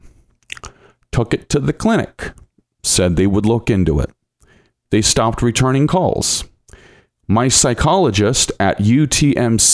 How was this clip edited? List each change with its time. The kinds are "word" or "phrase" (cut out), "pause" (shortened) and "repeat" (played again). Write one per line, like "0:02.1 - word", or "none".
none